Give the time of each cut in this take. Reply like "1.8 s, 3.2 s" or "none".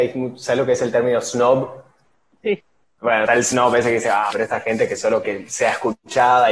3.3 s, 4.3 s, 5.2 s